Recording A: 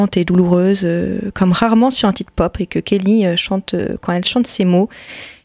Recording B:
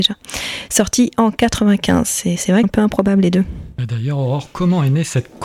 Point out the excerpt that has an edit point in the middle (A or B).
B